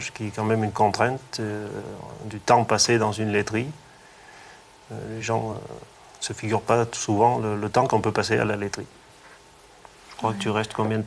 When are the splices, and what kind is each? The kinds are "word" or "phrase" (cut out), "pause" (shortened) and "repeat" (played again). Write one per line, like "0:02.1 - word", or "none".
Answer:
none